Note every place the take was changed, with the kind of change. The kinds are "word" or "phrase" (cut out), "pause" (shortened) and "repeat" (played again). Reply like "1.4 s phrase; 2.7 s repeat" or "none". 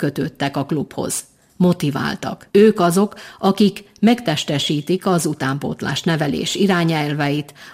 2.5 s pause